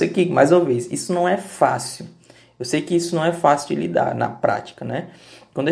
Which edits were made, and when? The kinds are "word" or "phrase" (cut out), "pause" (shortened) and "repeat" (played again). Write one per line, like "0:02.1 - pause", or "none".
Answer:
none